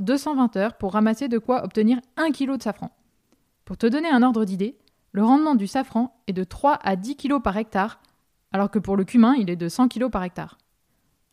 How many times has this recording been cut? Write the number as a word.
zero